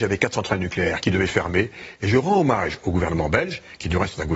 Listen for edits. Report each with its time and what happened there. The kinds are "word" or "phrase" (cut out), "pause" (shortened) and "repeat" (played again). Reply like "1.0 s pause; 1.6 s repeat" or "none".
none